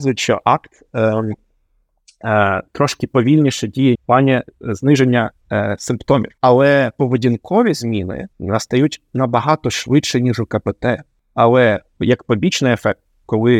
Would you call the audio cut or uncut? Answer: cut